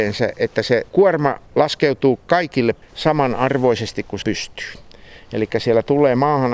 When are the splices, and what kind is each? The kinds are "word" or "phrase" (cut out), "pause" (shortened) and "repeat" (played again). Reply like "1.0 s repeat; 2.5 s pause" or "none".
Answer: 1.5 s pause; 2.8 s word; 4.2 s word